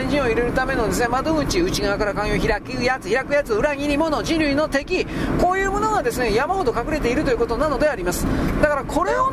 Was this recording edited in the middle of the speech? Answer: no; 0 cuts

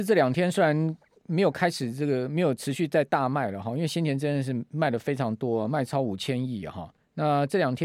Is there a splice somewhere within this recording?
no; 0 cuts

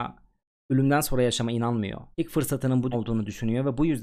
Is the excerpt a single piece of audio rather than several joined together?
no; 2 cuts; at 2.1 s, 2.9 s

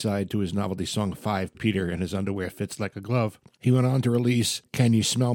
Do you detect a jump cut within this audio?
yes; 1 cut; at 1.5 s

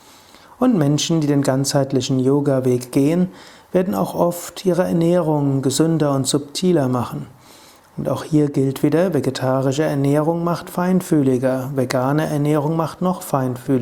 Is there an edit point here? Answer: no; 0 cuts

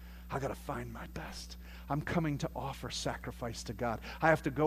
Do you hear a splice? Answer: no; 0 cuts

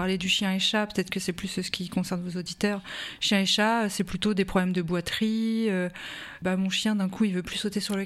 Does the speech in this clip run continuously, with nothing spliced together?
yes; 0 cuts

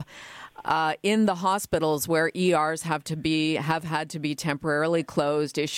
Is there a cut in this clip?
no; 0 cuts

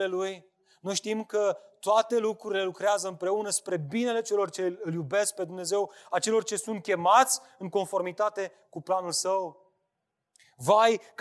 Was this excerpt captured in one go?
yes; 0 cuts

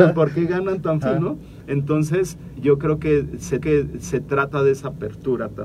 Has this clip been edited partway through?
yes; 3 cuts; at 1.0 s, 2.6 s, 3.6 s

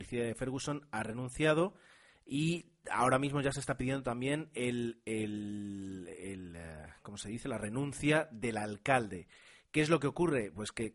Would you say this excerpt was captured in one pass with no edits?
yes; 0 cuts

